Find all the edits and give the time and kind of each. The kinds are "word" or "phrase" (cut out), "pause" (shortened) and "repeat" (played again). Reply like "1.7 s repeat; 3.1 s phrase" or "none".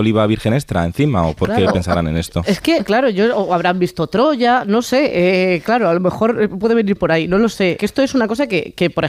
7.8 s phrase